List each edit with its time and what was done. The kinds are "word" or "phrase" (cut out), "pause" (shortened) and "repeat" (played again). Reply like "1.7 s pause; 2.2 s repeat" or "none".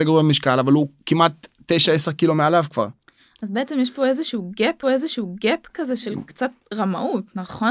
4.8 s repeat